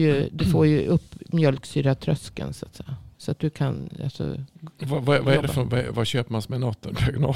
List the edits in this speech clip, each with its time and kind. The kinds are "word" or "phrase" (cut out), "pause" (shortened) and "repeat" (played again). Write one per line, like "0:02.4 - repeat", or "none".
0:03.1 - pause
0:04.5 - pause